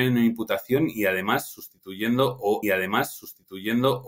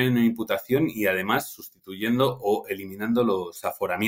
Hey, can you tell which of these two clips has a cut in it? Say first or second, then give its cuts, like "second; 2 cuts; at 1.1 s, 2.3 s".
first; 1 cut; at 2.6 s